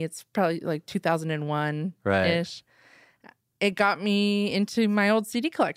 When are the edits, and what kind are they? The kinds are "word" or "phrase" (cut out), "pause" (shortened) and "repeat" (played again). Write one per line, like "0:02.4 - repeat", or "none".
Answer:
none